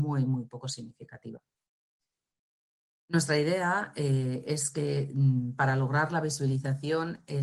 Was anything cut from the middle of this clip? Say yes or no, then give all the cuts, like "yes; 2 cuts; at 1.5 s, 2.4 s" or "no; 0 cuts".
no; 0 cuts